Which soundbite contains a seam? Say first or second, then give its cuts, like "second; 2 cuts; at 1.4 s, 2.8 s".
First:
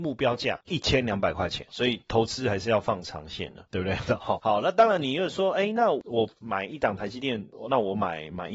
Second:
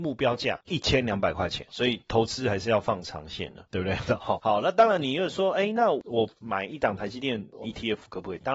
second; 1 cut; at 7.6 s